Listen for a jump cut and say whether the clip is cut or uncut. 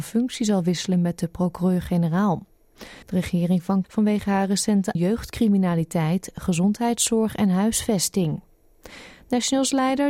cut